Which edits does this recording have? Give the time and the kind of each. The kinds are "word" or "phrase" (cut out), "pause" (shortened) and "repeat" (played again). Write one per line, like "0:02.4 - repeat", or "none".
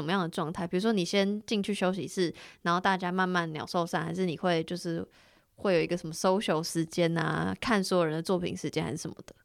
none